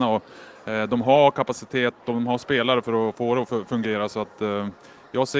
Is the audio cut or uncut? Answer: uncut